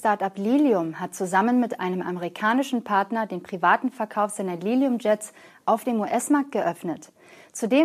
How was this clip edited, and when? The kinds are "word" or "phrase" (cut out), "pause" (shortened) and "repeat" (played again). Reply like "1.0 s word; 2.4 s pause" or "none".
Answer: none